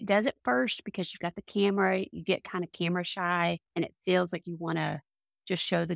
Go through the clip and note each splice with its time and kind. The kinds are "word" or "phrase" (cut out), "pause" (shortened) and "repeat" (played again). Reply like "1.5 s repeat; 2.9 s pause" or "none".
3.6 s pause